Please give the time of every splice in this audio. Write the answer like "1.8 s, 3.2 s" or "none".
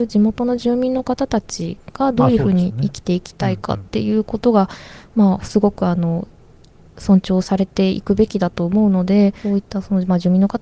3.9 s